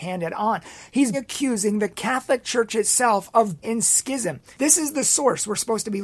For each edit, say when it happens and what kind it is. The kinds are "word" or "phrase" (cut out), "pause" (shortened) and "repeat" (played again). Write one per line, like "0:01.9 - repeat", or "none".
0:01.1 - word
0:03.6 - word
0:04.5 - pause

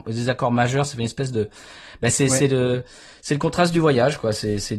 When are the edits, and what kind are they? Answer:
none

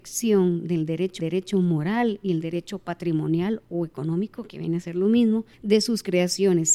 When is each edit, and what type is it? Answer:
0:01.2 - repeat
0:05.5 - pause

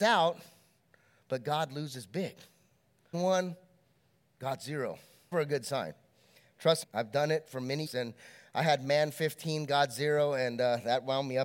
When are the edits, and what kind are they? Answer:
0:03.1 - word
0:05.3 - word
0:06.8 - word
0:07.9 - word

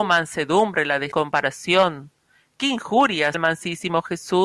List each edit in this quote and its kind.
0:01.1 - phrase
0:03.3 - word

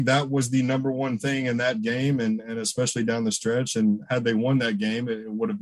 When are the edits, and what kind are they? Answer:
none

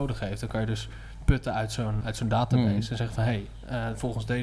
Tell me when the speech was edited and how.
0:02.0 - word

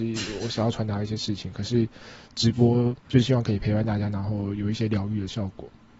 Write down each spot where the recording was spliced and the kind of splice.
0:03.0 - pause

